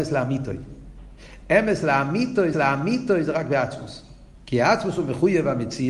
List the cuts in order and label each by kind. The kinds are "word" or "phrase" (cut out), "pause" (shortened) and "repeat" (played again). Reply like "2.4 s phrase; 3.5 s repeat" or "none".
2.5 s repeat; 4.3 s pause